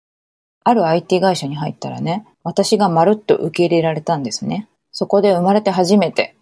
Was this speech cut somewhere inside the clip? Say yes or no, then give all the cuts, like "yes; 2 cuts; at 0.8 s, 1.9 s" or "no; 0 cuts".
yes; 2 cuts; at 2.3 s, 4.8 s